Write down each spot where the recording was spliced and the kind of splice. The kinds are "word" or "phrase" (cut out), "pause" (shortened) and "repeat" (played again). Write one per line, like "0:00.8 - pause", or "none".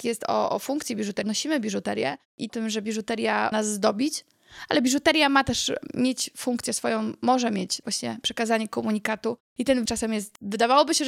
0:01.2 - word
0:02.5 - phrase
0:03.5 - word
0:07.8 - phrase
0:09.9 - word